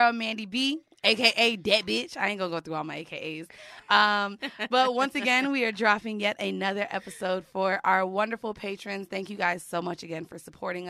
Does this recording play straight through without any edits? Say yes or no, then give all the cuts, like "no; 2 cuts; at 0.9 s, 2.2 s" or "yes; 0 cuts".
yes; 0 cuts